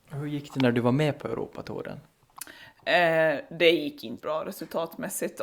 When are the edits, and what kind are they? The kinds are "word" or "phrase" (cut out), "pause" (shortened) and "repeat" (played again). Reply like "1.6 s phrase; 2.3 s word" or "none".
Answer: 3.5 s pause; 4.2 s word